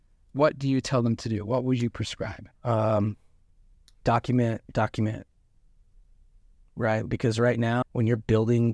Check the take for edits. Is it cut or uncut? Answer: cut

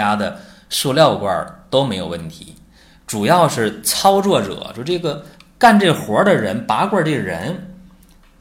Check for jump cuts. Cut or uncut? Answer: uncut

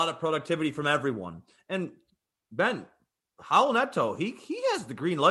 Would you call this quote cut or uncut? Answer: uncut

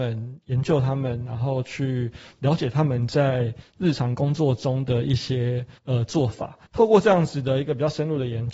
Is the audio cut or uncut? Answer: cut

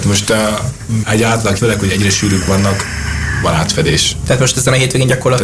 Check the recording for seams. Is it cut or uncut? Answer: cut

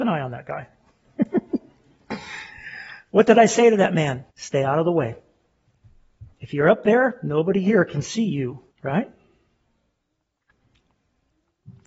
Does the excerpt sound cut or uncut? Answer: cut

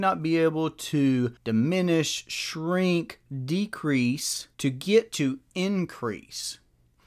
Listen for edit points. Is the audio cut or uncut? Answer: cut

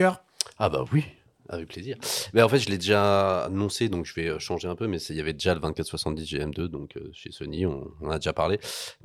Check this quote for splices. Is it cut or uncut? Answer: uncut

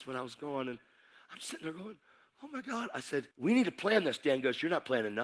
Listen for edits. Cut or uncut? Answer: cut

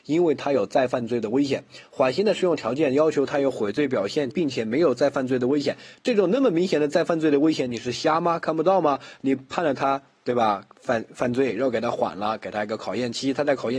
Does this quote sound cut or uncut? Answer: cut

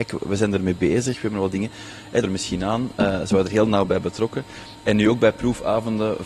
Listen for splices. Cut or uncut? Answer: cut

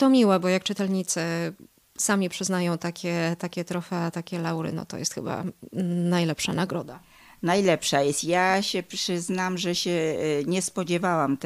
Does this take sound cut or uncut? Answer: uncut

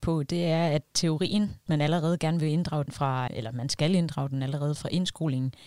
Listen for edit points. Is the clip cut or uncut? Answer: cut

